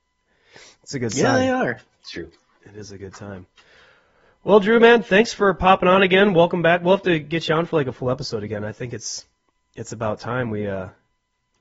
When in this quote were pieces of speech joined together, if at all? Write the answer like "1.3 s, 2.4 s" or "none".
none